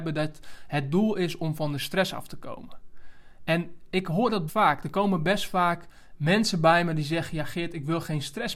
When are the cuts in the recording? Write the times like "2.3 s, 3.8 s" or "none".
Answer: 4.5 s